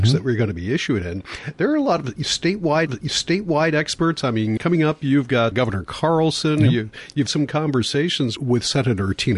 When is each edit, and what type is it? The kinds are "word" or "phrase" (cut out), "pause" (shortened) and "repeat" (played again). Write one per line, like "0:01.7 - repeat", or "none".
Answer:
0:02.9 - repeat
0:04.6 - word
0:05.5 - word
0:07.3 - word
0:08.4 - word